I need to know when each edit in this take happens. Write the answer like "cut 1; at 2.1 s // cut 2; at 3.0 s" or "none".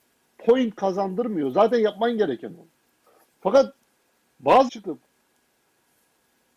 cut 1; at 4.7 s